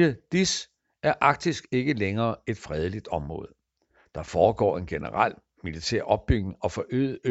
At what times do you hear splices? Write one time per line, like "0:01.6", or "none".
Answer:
none